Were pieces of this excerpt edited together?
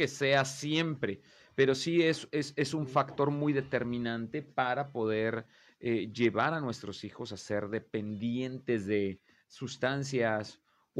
no; 0 cuts

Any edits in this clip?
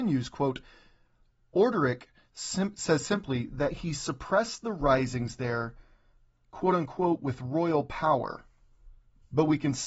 no; 0 cuts

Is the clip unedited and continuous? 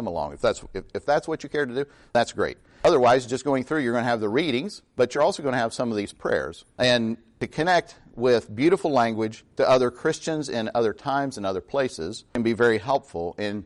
yes; 0 cuts

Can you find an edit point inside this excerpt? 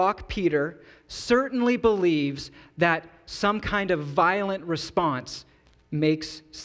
no; 0 cuts

